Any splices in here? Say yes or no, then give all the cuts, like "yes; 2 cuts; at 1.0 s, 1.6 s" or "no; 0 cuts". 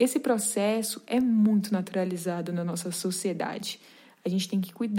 no; 0 cuts